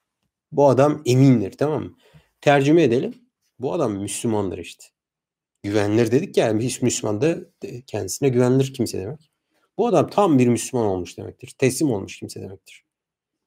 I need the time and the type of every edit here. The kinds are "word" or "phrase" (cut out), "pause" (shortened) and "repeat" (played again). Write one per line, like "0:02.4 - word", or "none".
none